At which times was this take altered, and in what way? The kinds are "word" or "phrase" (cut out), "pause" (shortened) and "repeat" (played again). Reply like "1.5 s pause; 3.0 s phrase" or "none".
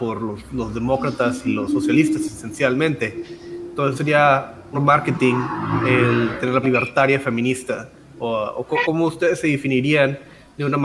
1.7 s word; 3.9 s word; 4.7 s word; 6.6 s word; 8.8 s word